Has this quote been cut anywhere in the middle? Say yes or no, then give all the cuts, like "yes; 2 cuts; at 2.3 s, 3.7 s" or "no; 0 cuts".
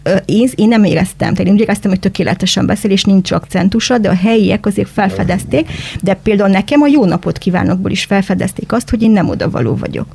no; 0 cuts